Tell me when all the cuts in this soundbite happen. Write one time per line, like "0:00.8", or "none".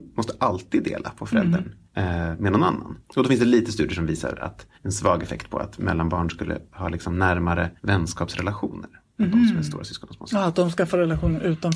0:01.9
0:03.0
0:04.7
0:07.8